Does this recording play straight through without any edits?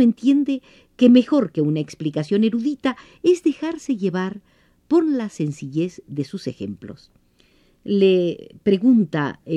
yes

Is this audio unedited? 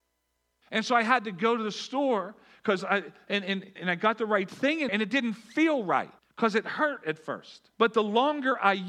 no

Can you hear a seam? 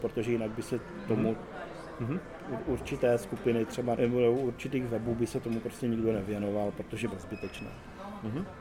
yes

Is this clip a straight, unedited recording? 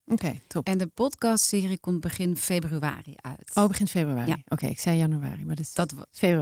yes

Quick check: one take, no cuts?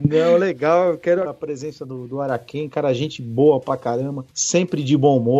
no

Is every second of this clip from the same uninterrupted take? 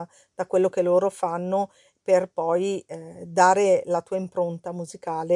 yes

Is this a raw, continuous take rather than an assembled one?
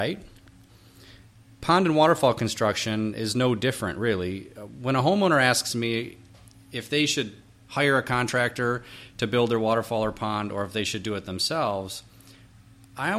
yes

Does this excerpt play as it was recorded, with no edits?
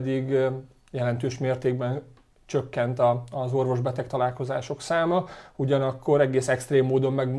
yes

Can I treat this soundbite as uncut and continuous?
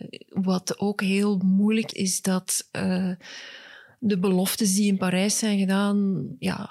no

